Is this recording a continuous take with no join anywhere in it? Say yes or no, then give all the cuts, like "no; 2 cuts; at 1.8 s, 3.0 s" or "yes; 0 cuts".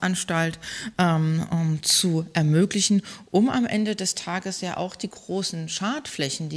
yes; 0 cuts